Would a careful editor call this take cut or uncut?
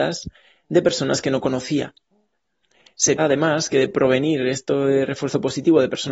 cut